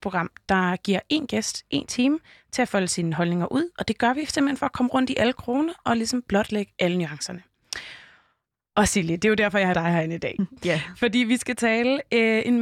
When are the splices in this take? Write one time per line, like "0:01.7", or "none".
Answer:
0:09.7